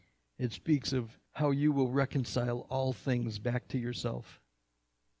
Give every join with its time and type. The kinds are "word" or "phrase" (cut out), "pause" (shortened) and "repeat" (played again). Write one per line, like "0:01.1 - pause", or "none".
0:01.3 - pause